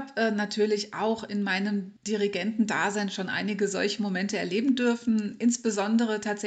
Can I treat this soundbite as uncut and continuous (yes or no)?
no